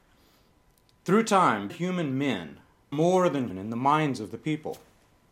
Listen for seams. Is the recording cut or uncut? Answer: cut